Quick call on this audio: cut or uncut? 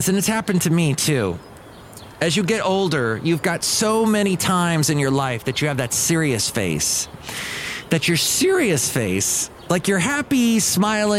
uncut